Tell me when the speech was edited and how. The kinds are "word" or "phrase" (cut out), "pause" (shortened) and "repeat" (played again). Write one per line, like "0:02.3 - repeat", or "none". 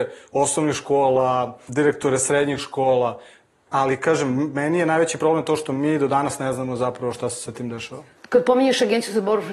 none